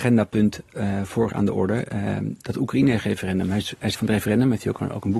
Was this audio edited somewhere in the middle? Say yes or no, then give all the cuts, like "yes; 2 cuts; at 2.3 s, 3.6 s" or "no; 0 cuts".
yes; 2 cuts; at 1.3 s, 3.9 s